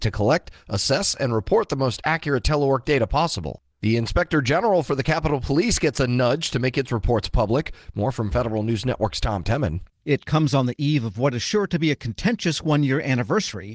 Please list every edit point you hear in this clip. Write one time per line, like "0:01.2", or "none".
0:03.7